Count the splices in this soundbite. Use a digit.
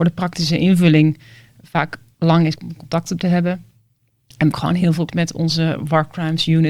4